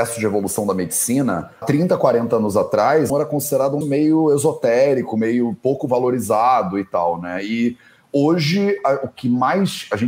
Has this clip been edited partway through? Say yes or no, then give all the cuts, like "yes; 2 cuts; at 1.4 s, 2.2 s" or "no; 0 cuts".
yes; 3 cuts; at 1.6 s, 3.1 s, 3.8 s